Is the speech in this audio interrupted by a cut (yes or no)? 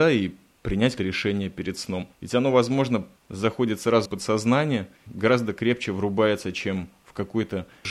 yes